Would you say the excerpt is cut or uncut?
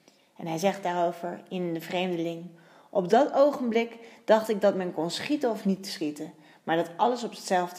uncut